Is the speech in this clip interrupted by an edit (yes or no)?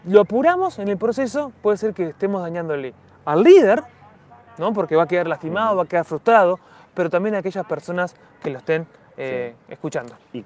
no